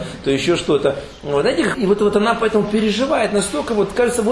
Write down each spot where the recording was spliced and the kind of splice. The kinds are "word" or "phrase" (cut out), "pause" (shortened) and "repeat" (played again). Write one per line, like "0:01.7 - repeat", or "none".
0:01.7 - word